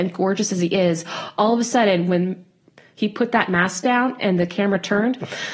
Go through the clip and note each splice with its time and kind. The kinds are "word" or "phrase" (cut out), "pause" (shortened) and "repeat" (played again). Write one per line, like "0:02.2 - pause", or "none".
none